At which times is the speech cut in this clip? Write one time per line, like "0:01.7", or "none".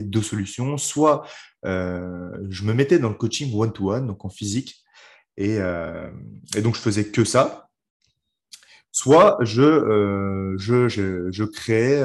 none

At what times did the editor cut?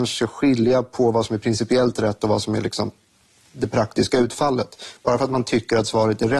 none

